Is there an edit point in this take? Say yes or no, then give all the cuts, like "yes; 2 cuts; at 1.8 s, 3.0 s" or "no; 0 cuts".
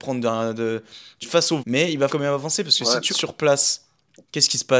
yes; 4 cuts; at 1.2 s, 1.6 s, 2.1 s, 3.1 s